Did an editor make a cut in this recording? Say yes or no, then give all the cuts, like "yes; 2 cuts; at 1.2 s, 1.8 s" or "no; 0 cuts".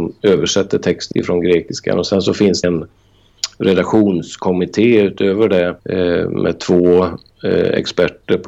yes; 3 cuts; at 1.1 s, 2.6 s, 5.8 s